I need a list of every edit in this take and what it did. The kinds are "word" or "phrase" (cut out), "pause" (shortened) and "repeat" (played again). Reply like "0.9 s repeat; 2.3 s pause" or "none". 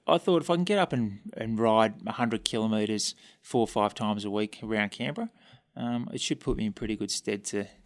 none